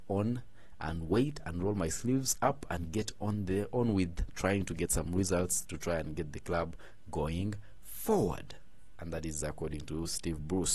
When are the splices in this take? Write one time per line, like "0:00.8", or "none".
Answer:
none

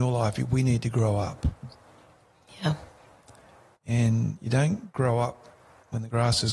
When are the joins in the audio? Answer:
none

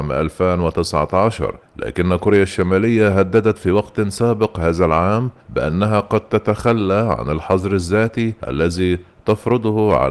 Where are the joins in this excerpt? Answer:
0:01.6
0:05.4
0:08.4

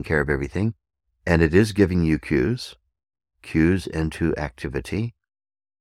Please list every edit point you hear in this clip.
none

